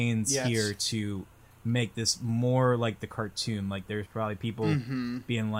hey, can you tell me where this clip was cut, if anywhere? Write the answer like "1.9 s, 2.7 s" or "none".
none